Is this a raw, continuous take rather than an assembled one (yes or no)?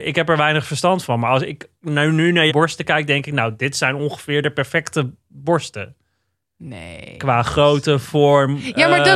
no